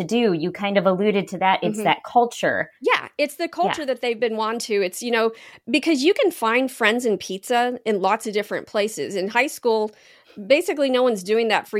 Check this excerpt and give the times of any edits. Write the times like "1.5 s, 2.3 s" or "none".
2.8 s

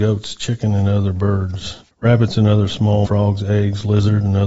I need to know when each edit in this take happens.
1.9 s, 3.1 s

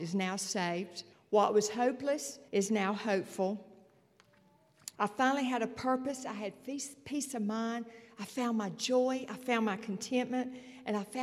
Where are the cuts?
1.1 s, 2.5 s, 4.9 s

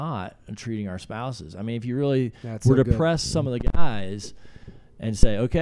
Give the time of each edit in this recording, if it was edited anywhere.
none

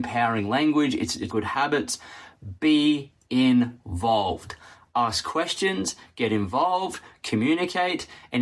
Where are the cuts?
1.3 s

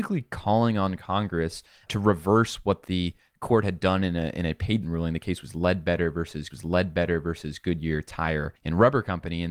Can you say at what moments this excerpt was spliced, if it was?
1.9 s, 4.8 s, 6.5 s, 8.6 s

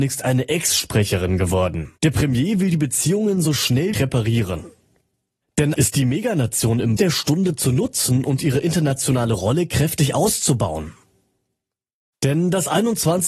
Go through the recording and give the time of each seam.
2.0 s, 3.9 s, 5.8 s, 7.0 s

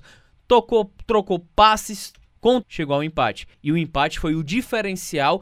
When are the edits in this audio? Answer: 2.6 s, 3.5 s

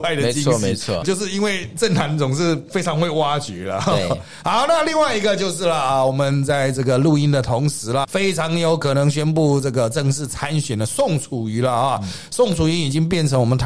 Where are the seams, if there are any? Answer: 1.0 s, 8.0 s

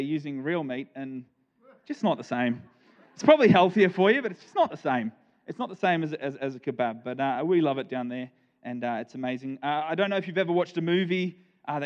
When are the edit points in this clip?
none

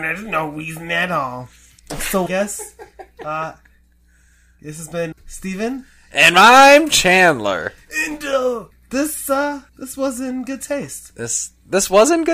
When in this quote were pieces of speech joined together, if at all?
2.3 s, 5.1 s, 8.7 s, 9.7 s

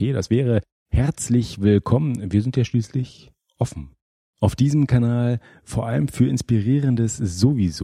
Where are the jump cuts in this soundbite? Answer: none

